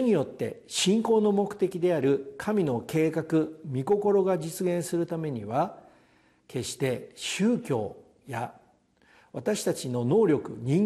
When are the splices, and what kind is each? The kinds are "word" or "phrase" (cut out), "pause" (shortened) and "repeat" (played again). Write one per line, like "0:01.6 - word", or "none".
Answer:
none